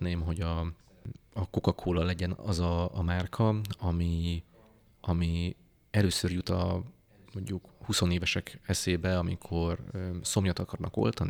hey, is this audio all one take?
yes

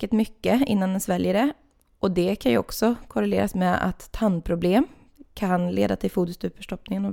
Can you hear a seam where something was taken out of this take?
no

